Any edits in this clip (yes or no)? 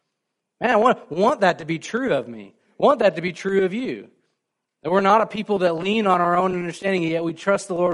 no